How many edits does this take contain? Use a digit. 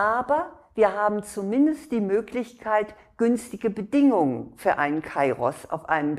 0